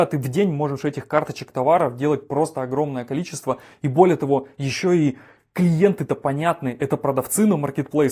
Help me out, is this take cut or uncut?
uncut